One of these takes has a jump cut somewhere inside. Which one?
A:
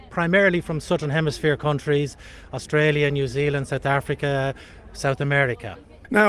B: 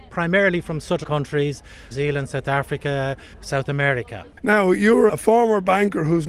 B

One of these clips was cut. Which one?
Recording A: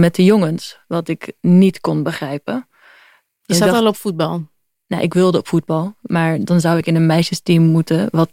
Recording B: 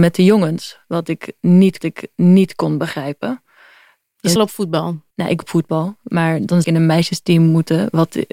B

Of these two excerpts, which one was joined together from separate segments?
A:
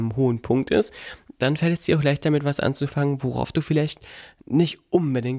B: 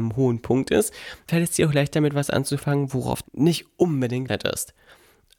B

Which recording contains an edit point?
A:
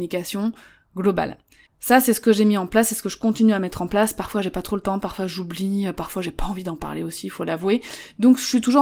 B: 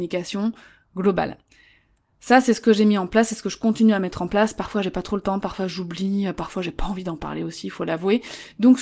A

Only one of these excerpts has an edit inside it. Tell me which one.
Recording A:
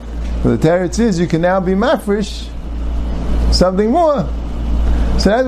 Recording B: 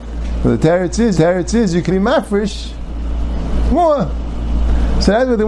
B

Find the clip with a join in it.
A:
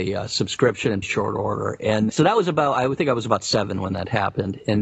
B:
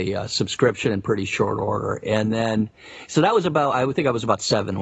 A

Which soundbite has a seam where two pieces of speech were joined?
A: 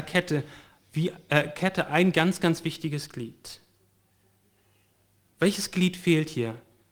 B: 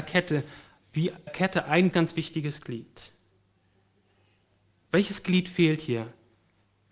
B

